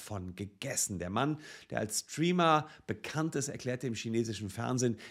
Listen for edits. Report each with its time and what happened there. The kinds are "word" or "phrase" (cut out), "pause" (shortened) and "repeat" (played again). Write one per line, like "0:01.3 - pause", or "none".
none

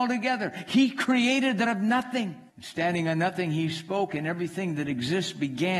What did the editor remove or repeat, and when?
0:01.7 - word
0:02.5 - pause

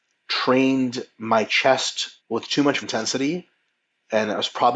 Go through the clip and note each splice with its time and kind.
0:02.2 - pause
0:02.8 - phrase

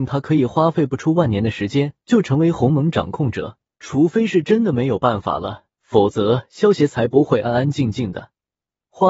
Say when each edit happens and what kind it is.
0:02.0 - pause
0:03.7 - pause
0:05.7 - pause

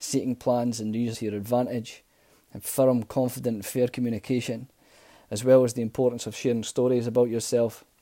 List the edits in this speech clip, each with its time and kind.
0:01.1 - word

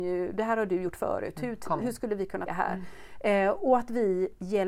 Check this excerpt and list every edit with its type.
0:01.8 - word
0:02.5 - word

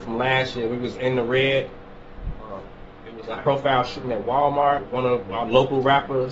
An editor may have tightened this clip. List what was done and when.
0:03.4 - word

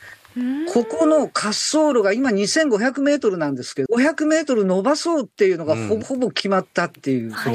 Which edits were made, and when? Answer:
0:03.9 - phrase
0:06.0 - phrase

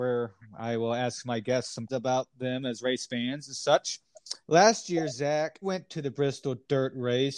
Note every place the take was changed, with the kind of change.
0:01.9 - word
0:04.4 - pause
0:05.6 - word

